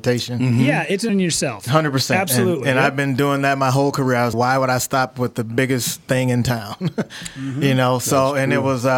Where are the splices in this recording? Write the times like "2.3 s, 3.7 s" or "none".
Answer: 1.1 s, 4.3 s